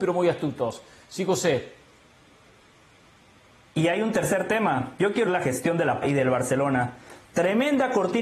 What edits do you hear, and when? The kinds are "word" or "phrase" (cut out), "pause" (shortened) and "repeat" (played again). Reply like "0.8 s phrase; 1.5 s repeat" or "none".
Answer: 5.3 s word; 6.0 s word